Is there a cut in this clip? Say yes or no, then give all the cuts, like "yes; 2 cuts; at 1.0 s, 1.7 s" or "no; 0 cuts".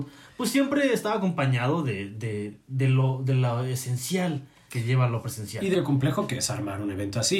yes; 2 cuts; at 4.7 s, 5.7 s